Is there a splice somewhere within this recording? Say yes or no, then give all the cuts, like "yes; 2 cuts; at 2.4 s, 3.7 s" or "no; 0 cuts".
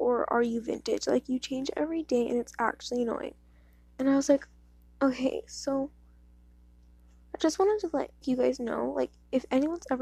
yes; 1 cut; at 8.2 s